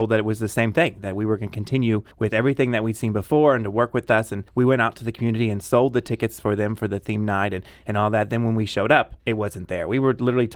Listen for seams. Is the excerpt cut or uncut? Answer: cut